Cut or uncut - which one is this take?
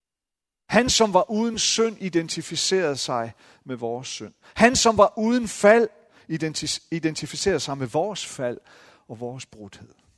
uncut